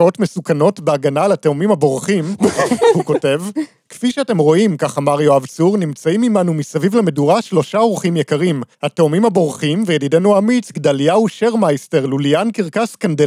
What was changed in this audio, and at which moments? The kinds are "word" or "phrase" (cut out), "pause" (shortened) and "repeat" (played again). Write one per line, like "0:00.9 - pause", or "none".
0:08.7 - pause